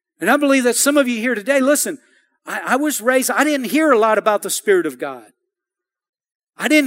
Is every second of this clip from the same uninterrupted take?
yes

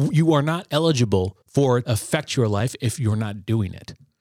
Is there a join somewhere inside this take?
yes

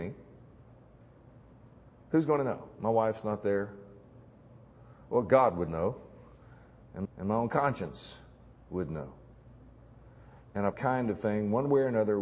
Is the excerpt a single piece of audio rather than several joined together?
no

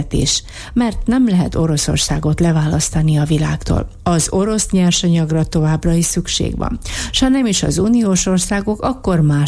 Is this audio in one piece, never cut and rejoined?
yes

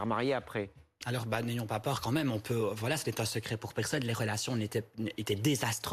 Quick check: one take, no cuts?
yes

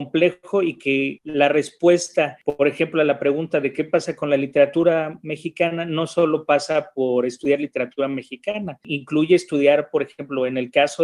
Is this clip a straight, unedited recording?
yes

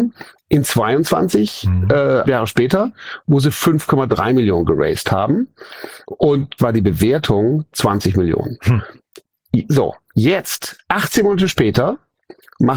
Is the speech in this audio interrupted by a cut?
yes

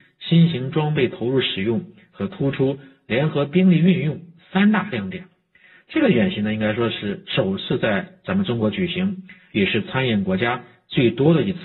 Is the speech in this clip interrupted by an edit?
no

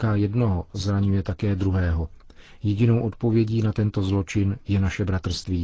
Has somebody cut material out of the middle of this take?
no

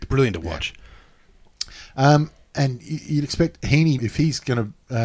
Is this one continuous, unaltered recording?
no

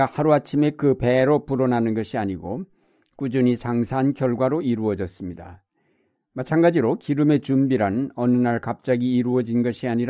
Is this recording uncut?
yes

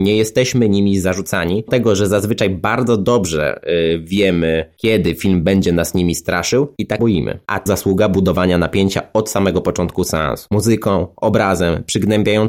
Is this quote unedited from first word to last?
no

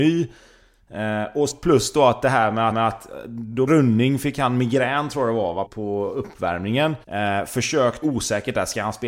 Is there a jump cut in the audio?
yes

